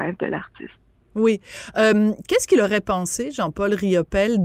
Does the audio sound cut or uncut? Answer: uncut